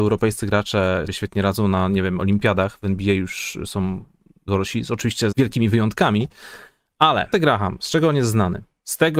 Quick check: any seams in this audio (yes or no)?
yes